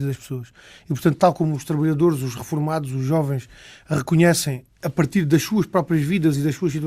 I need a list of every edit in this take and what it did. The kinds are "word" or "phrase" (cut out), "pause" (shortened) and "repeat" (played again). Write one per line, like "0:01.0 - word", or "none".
none